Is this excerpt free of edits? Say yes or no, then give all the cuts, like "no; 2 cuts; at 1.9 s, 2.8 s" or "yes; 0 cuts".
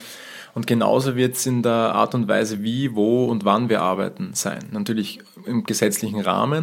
yes; 0 cuts